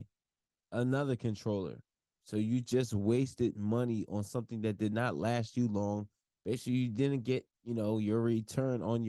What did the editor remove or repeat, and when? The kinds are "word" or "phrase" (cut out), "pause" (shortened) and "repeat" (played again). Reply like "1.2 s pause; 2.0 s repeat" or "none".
none